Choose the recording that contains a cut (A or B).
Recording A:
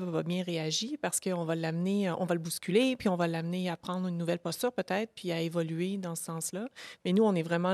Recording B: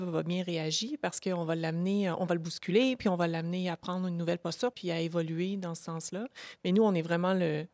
B